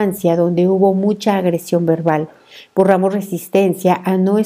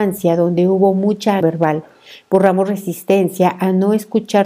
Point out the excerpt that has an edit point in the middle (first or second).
second